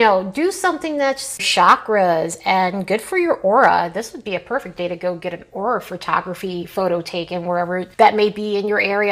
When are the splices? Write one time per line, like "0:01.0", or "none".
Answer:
0:01.4